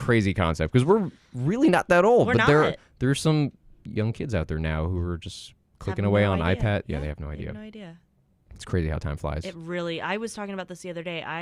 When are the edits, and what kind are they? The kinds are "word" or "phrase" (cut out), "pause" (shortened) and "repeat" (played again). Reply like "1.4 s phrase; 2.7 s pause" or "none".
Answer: none